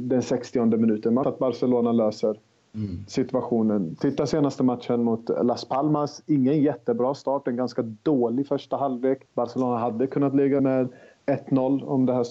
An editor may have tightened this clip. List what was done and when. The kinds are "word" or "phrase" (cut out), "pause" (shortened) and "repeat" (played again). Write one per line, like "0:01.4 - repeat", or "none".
0:01.2 - word
0:09.3 - pause
0:10.6 - word